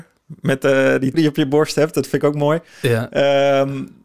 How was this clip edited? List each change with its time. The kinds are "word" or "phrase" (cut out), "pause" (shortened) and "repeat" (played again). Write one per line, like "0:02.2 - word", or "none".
0:01.1 - word